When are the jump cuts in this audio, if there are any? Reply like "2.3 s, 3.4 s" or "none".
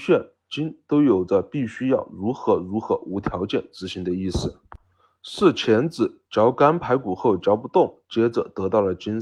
none

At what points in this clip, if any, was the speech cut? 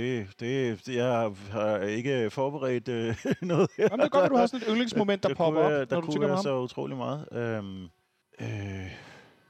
8.2 s

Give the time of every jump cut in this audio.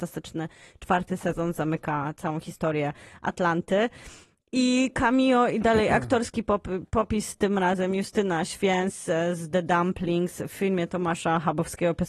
none

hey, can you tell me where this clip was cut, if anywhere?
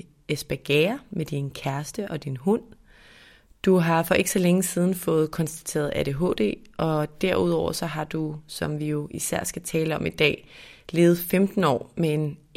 none

